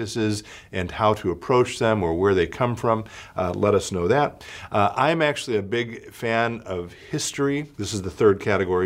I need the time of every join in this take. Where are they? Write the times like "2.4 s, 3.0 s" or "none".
7.7 s